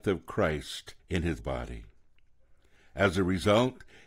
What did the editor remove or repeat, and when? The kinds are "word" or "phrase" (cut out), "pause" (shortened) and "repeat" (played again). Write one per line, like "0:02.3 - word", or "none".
0:01.0 - pause
0:01.4 - word